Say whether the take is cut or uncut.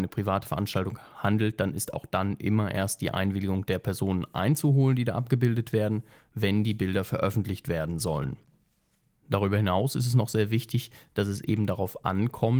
uncut